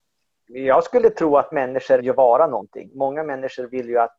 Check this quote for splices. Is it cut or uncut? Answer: cut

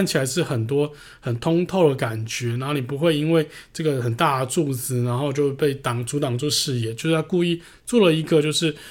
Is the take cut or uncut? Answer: uncut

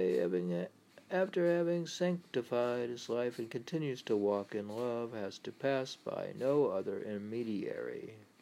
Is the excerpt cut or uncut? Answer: uncut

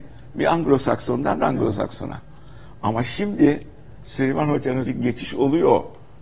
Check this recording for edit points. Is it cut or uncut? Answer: cut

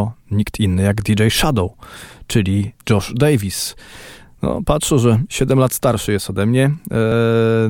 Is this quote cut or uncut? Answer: uncut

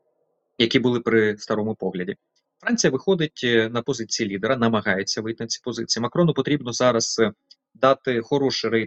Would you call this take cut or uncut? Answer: uncut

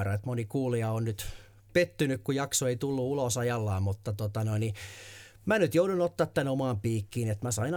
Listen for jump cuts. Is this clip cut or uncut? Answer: uncut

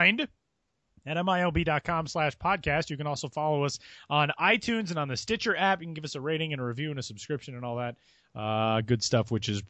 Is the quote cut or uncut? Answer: uncut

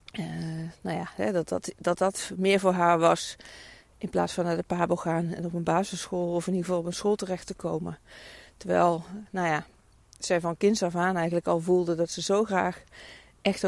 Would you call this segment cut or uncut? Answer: cut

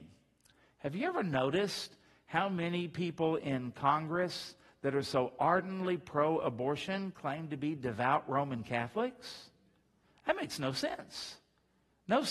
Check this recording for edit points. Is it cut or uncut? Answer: uncut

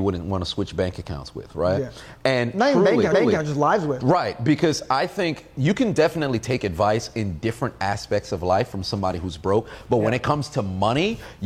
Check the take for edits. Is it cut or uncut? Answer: cut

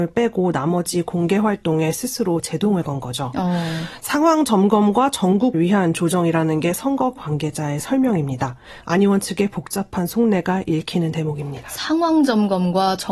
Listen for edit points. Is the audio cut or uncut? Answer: cut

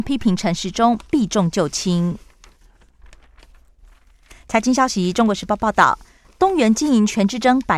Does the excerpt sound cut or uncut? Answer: uncut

